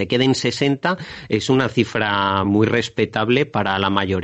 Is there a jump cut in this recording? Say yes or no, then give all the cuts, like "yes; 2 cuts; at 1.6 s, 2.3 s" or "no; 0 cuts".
no; 0 cuts